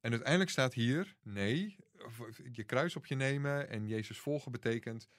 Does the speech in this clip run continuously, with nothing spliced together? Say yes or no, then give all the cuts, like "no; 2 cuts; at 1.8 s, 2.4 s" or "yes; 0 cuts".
no; 1 cut; at 1.2 s